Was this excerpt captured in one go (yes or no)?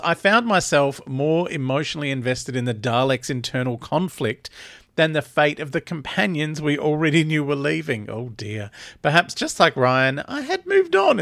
yes